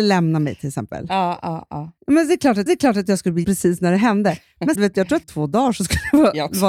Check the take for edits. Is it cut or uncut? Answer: cut